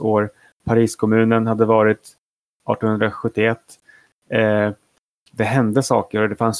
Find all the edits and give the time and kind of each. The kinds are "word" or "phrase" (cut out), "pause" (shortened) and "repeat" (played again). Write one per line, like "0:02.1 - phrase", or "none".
none